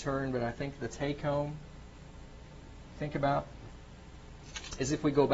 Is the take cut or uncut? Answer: uncut